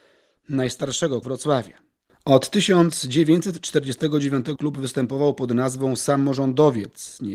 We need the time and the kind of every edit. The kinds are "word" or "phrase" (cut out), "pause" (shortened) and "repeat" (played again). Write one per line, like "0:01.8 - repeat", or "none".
0:01.2 - word
0:04.6 - word